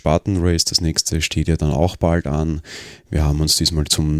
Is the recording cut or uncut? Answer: uncut